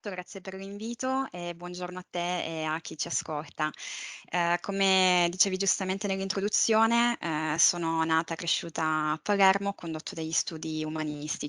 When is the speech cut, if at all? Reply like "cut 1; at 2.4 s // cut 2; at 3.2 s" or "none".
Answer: none